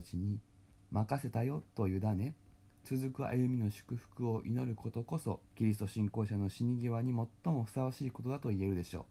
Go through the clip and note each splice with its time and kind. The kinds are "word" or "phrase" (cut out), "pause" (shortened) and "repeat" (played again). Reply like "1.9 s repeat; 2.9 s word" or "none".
5.4 s pause

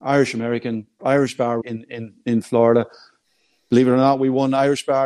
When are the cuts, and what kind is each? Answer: 1.0 s word; 1.6 s word

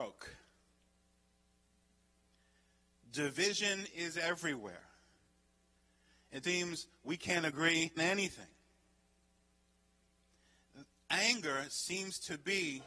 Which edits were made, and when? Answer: 6.4 s word; 8.0 s word

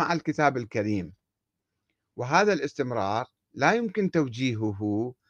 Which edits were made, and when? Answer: none

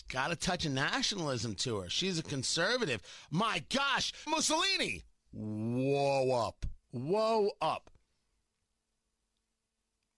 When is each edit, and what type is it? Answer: 4.3 s phrase; 6.8 s pause

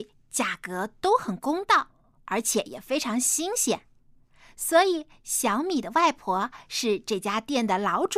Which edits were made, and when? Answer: none

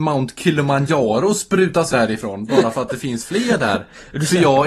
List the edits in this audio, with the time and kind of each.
1.9 s word

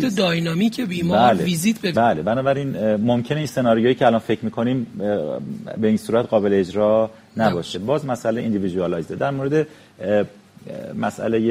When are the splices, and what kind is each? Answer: 1.9 s word

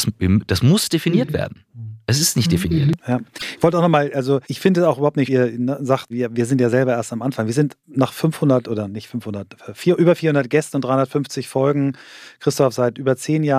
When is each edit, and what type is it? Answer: 4.4 s pause; 5.3 s phrase; 6.1 s word

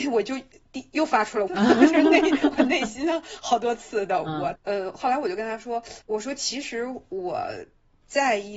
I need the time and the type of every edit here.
1.5 s word; 4.6 s word; 6.0 s pause

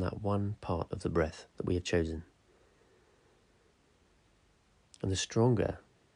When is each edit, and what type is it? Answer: 1.5 s pause

